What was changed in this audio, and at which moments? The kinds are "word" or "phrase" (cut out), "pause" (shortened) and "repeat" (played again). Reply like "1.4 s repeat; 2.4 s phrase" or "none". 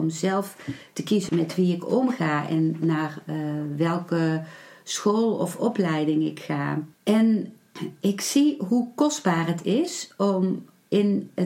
1.3 s word; 6.9 s pause